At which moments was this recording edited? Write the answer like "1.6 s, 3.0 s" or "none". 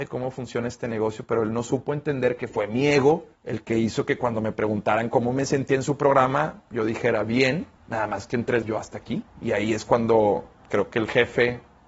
3.4 s, 7.8 s, 8.6 s, 9.3 s